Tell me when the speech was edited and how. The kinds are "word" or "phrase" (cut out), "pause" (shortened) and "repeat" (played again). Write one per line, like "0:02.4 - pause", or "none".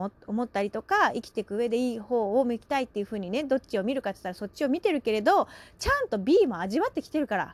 none